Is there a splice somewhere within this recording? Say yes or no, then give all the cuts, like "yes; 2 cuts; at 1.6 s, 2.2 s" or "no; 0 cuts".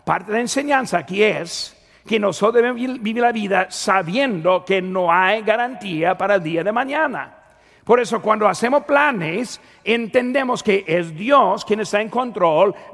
no; 0 cuts